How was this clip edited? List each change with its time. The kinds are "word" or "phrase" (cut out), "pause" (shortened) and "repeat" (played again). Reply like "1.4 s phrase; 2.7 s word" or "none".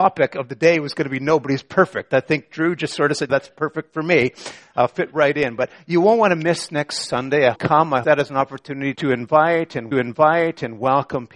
3.3 s word; 7.5 s phrase; 8.0 s phrase; 8.9 s word; 9.9 s repeat